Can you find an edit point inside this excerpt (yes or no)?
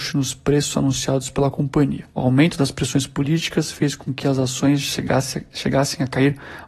yes